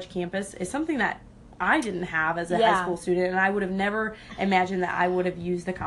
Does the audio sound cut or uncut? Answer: uncut